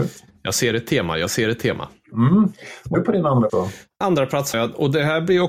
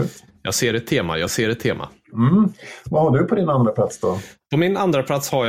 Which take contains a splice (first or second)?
first